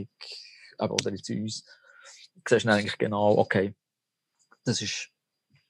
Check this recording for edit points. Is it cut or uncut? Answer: uncut